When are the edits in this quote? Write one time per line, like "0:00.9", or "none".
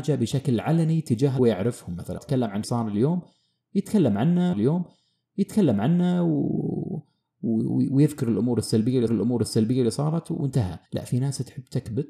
0:01.4
0:02.2
0:02.6
0:04.5
0:09.1
0:10.9